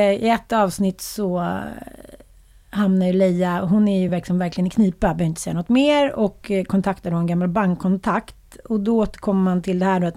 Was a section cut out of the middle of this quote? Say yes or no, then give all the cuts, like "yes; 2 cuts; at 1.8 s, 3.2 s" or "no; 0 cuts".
no; 0 cuts